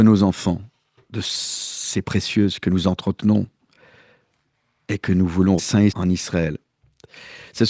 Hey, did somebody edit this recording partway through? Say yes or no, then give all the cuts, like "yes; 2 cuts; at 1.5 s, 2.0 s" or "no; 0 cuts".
yes; 3 cuts; at 2.0 s, 5.6 s, 5.9 s